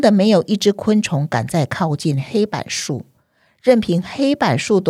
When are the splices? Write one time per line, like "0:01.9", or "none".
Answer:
none